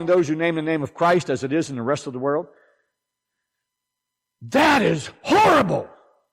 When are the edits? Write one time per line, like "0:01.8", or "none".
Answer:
none